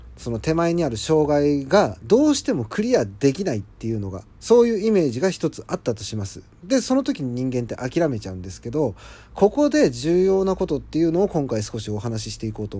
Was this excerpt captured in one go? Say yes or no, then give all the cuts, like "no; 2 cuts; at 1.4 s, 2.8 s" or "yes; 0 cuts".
no; 1 cut; at 4.3 s